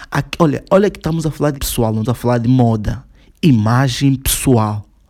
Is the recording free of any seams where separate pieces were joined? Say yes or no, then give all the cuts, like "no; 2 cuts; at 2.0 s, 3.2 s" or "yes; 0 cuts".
no; 2 cuts; at 1.5 s, 2.0 s